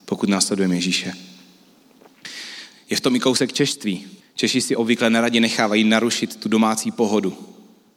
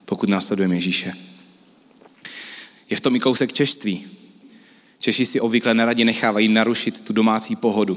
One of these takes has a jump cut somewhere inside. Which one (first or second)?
first